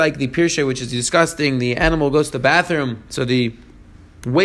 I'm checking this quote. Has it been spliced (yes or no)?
no